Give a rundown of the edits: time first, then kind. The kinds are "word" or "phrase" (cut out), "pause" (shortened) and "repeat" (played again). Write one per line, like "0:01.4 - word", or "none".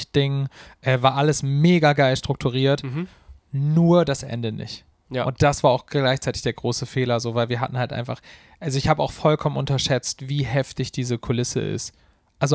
none